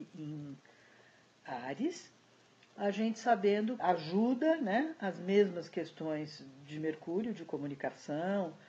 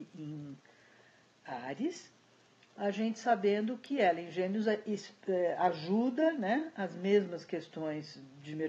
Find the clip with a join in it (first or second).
first